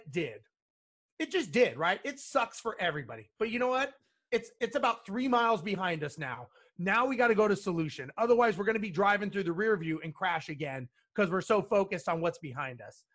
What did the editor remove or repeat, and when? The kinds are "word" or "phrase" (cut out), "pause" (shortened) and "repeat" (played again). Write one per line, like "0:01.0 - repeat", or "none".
none